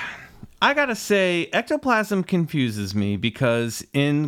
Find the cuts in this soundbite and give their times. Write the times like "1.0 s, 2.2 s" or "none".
none